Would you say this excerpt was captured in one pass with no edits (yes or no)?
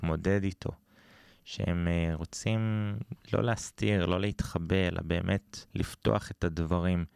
no